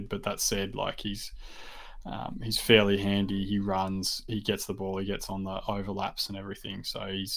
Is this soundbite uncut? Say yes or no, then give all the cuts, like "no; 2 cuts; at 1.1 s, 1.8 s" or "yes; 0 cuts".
yes; 0 cuts